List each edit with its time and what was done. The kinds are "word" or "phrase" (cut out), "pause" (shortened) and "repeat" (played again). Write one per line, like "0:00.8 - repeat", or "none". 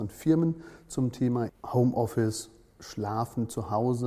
0:01.5 - word